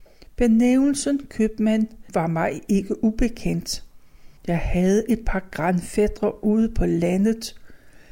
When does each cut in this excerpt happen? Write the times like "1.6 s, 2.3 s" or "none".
4.4 s